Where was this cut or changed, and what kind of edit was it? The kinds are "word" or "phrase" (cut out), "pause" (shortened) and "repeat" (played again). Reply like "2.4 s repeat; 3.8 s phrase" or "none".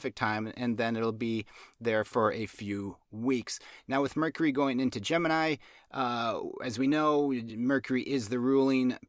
none